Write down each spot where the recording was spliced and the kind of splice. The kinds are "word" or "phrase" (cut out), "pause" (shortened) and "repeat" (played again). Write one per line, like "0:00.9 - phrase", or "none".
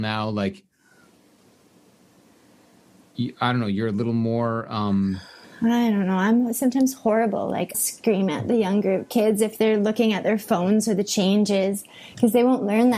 0:05.4 - pause
0:07.7 - word